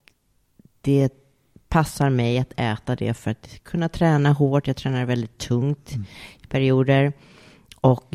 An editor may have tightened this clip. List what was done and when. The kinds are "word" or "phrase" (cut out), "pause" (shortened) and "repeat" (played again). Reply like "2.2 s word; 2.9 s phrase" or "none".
none